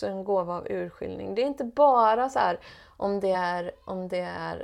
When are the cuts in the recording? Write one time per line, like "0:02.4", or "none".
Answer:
none

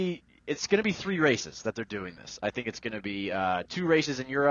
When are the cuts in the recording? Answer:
none

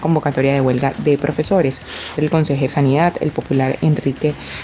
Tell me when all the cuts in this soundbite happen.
0:02.2
0:02.7

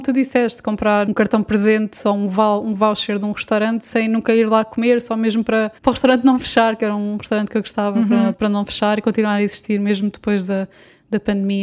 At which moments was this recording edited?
0:05.8

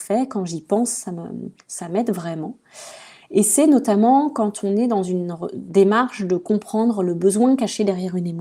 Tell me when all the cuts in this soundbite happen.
none

